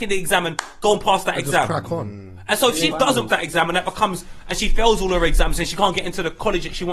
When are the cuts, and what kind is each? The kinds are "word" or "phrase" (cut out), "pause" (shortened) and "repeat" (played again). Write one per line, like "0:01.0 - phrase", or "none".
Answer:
0:02.9 - word
0:03.3 - word